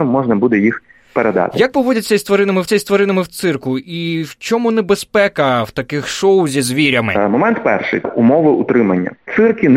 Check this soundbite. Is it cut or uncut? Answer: cut